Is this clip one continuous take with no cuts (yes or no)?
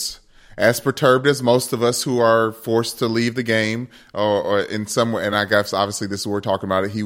yes